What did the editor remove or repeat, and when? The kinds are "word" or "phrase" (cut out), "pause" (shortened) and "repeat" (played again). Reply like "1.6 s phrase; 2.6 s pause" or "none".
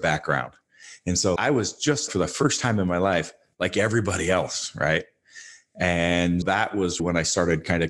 1.4 s word; 2.1 s word; 6.4 s word; 7.0 s word